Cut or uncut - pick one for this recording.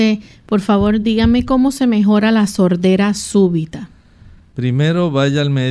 uncut